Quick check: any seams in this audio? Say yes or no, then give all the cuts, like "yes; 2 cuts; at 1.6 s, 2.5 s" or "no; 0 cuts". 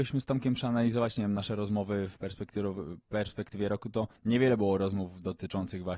yes; 1 cut; at 4.2 s